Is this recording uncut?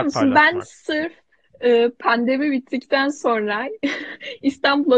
yes; 0 cuts

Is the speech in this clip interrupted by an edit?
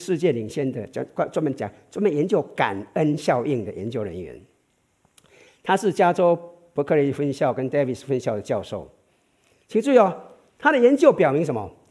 no; 0 cuts

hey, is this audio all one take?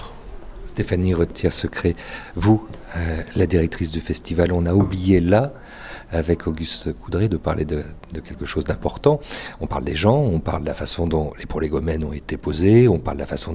yes; 0 cuts

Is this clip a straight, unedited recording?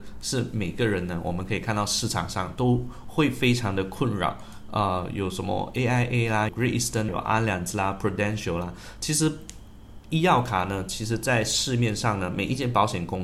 no; 2 cuts; at 6.5 s, 7.1 s

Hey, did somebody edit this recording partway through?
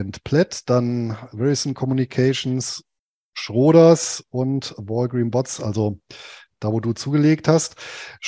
no; 0 cuts

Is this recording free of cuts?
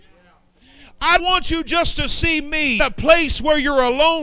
no; 2 cuts; at 1.2 s, 2.8 s

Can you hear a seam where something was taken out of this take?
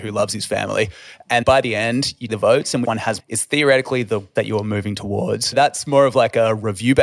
yes; 6 cuts; at 1.4 s, 2.3 s, 2.8 s, 3.2 s, 4.4 s, 5.5 s

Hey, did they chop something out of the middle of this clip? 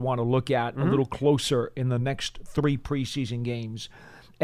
no; 0 cuts

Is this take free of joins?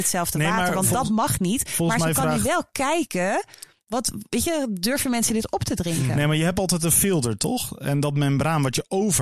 yes; 0 cuts

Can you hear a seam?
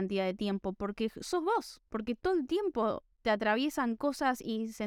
yes; 2 cuts; at 1.9 s, 3.1 s

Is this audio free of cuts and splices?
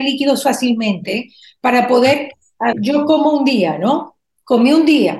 no; 1 cut; at 2.7 s

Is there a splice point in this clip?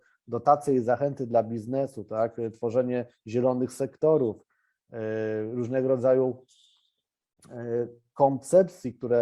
no; 0 cuts

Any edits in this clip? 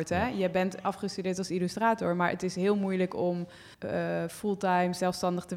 yes; 1 cut; at 3.7 s

